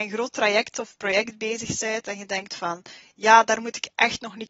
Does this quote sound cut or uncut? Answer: uncut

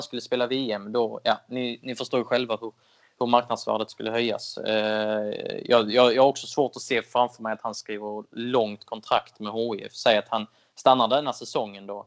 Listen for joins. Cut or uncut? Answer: uncut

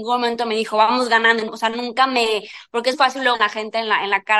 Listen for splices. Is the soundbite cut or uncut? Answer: cut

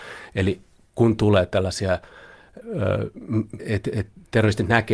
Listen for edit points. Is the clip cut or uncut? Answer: cut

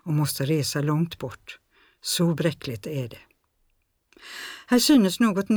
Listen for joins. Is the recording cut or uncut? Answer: uncut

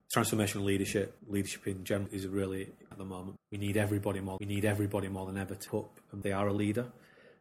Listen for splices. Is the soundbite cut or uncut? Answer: cut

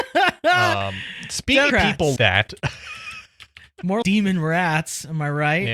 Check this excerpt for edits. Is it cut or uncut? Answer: cut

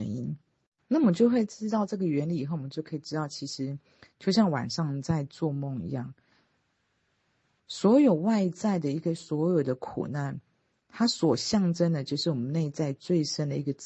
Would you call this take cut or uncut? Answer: uncut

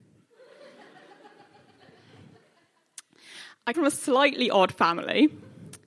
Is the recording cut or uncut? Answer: cut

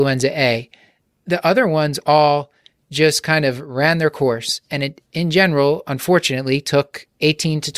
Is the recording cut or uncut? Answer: uncut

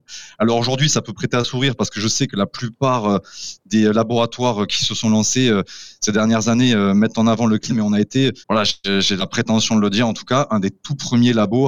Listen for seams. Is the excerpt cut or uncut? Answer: cut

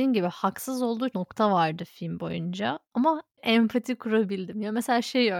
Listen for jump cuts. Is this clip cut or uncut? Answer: cut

